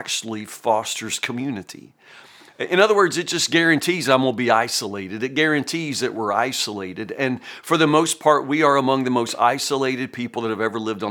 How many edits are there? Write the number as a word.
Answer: zero